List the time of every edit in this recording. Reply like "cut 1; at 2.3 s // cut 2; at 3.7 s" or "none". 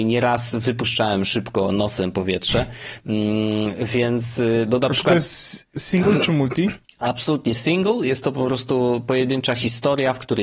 cut 1; at 6.8 s